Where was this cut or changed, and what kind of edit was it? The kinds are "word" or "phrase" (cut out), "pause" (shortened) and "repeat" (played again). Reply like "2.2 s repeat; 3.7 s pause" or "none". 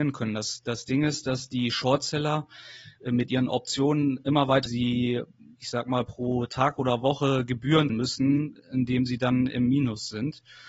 4.7 s phrase; 7.9 s word